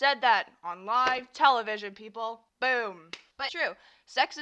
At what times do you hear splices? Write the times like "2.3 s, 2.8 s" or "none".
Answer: 3.5 s